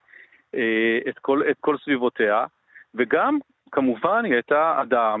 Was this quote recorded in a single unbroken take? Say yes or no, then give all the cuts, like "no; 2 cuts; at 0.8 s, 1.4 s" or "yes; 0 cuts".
yes; 0 cuts